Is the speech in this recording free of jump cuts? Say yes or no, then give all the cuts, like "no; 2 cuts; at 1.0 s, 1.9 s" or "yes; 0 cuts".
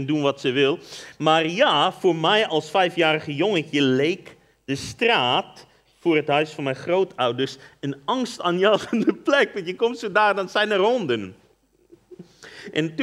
yes; 0 cuts